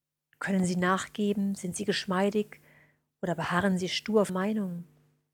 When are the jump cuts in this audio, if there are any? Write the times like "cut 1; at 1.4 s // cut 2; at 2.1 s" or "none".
cut 1; at 4.3 s